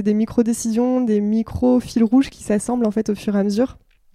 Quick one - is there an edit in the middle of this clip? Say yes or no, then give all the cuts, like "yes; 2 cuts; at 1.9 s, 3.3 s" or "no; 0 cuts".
no; 0 cuts